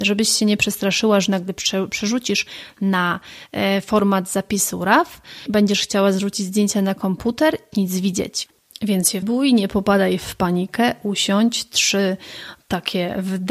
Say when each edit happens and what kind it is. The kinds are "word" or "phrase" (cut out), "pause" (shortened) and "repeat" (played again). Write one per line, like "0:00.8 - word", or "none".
0:07.7 - phrase
0:09.2 - phrase